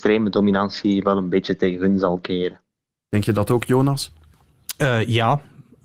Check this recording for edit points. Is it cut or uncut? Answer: uncut